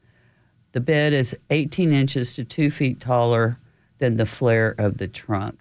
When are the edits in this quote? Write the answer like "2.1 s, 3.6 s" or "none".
none